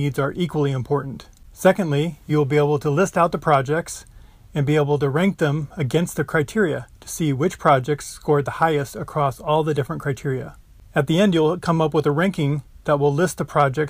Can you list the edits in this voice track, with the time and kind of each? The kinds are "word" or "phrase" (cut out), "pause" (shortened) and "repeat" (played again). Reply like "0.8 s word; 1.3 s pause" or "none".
none